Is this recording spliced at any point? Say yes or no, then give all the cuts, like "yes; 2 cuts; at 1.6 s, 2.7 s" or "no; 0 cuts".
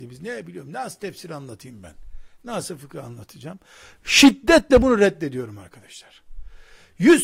no; 0 cuts